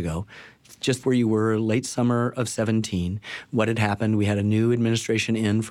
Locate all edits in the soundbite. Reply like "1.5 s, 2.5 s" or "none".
1.0 s